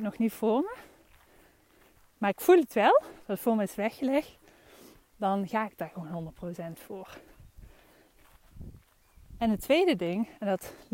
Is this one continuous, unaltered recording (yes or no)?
yes